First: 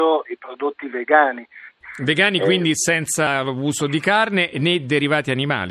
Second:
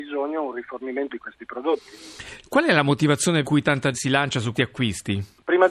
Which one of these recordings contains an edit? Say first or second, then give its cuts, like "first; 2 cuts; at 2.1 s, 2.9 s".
second; 4 cuts; at 1.1 s, 3.4 s, 3.9 s, 4.5 s